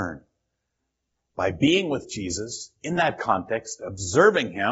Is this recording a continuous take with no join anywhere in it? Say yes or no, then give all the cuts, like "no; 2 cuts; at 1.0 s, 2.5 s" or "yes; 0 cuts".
yes; 0 cuts